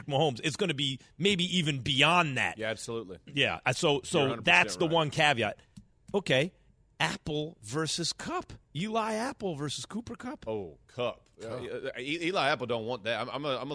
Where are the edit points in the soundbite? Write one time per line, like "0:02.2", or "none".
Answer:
none